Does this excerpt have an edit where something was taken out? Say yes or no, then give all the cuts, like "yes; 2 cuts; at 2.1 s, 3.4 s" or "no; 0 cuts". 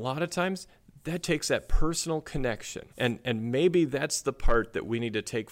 yes; 2 cuts; at 1.2 s, 2.9 s